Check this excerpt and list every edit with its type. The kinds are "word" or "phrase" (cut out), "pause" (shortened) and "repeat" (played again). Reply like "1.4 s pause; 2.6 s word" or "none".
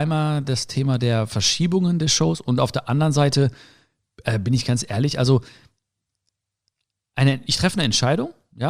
none